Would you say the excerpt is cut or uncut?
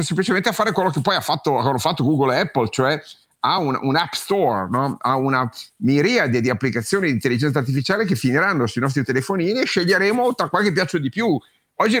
uncut